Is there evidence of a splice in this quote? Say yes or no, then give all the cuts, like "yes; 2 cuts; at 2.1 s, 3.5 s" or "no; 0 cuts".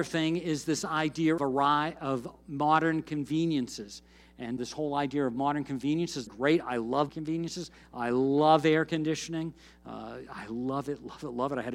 yes; 4 cuts; at 1.4 s, 4.6 s, 6.3 s, 7.1 s